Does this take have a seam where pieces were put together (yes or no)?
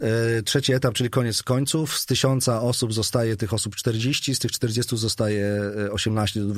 no